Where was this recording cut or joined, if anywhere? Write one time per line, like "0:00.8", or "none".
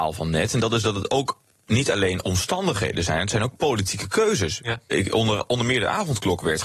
none